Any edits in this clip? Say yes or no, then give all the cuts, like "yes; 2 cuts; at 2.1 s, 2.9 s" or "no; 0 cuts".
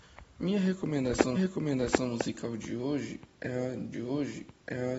yes; 2 cuts; at 1.4 s, 3.9 s